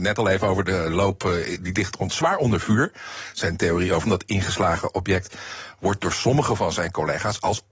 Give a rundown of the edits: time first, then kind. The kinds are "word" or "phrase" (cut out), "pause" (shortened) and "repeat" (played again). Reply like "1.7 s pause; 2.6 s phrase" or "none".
4.1 s phrase